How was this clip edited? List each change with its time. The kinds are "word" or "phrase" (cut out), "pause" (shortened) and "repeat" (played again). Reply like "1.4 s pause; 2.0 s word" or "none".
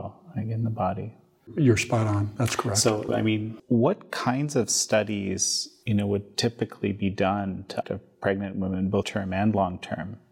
3.1 s word; 5.8 s pause; 7.8 s phrase; 9.0 s word